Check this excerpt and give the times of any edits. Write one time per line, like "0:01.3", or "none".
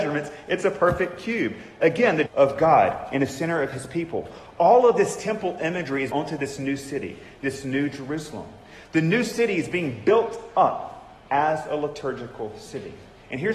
0:02.3
0:06.1

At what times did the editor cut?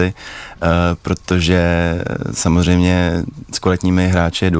0:03.5

